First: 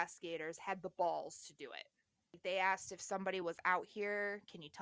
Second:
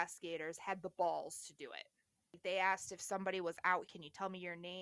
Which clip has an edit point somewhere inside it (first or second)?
second